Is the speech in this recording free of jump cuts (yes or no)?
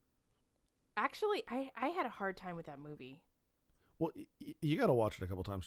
yes